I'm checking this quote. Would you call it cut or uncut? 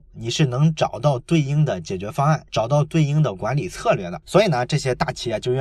cut